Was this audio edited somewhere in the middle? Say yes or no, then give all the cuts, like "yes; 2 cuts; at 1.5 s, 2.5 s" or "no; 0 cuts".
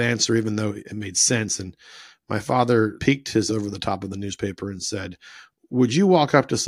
yes; 2 cuts; at 3.0 s, 3.5 s